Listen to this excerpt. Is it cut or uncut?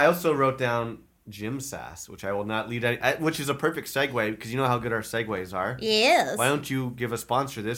uncut